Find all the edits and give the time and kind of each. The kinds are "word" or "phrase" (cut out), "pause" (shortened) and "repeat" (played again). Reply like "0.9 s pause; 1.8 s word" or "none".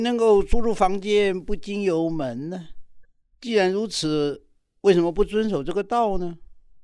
none